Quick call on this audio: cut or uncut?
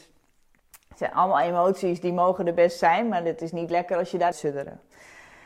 cut